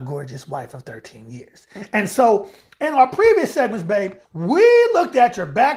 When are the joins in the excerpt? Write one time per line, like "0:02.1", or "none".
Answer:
0:04.2